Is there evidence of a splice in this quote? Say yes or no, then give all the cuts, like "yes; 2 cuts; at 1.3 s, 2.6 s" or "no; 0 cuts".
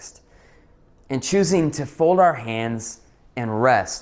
no; 0 cuts